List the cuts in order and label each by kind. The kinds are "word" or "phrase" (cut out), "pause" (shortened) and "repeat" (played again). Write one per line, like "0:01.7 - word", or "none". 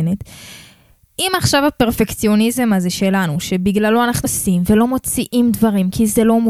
0:04.2 - word